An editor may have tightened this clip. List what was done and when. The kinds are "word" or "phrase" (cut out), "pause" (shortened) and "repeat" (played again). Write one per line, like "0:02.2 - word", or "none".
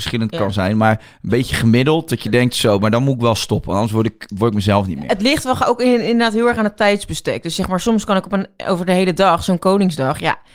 none

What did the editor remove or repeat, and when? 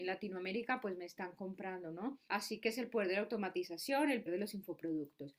0:04.3 - word

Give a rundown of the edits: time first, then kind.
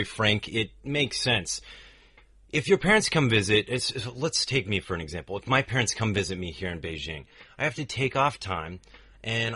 none

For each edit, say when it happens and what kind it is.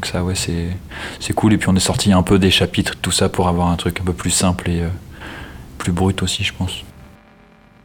none

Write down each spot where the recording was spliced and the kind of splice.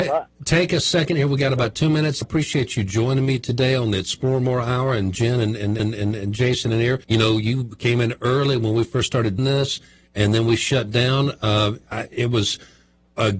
0:02.2 - phrase
0:05.8 - repeat
0:07.0 - pause
0:09.4 - word

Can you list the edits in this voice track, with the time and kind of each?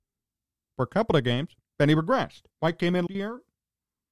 0:01.7 - pause
0:02.5 - pause
0:03.1 - word

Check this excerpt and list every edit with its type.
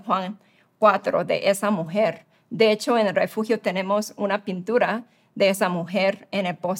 none

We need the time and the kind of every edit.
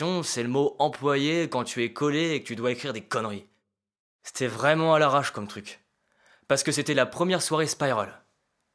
none

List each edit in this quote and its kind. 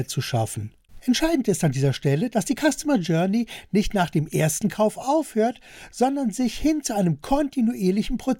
none

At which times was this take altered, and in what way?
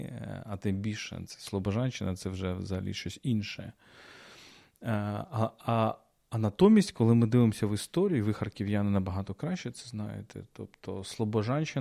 none

